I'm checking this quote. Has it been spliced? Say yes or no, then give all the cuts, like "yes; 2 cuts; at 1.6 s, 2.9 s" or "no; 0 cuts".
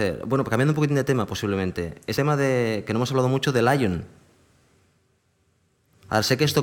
yes; 1 cut; at 2.2 s